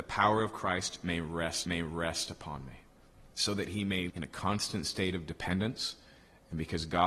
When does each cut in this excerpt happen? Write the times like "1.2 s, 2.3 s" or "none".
1.6 s, 3.3 s, 4.1 s